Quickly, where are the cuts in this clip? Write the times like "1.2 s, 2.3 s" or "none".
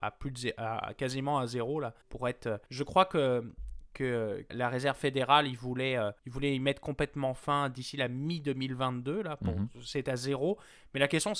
2.0 s, 2.7 s, 4.5 s, 6.2 s

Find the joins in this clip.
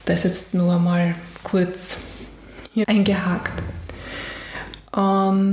1.4 s, 2.8 s

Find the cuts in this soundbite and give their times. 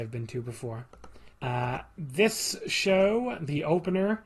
1.3 s

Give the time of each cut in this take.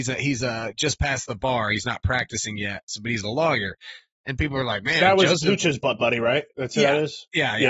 6.5 s

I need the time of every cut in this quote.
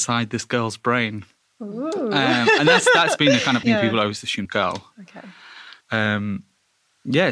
1.4 s, 3.6 s, 4.4 s, 5.8 s

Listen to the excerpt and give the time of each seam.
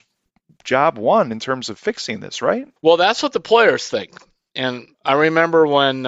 2.8 s, 4.9 s

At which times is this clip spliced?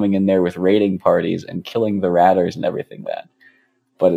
3.0 s

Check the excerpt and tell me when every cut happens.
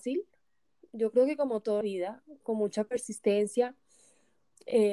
1.8 s

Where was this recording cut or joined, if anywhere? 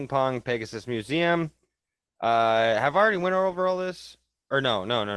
none

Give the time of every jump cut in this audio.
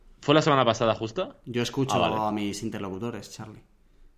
none

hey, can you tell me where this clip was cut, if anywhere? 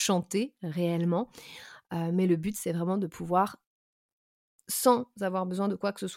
none

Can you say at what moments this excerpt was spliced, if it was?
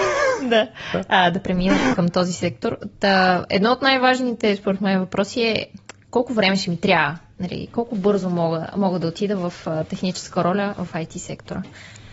1.9 s

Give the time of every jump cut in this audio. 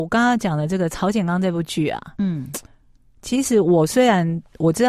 none

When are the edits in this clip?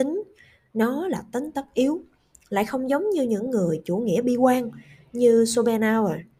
none

